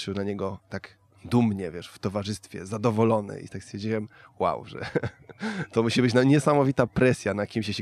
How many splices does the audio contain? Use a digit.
0